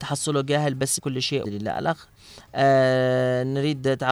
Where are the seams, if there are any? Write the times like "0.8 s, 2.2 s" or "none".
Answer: 1.0 s, 1.4 s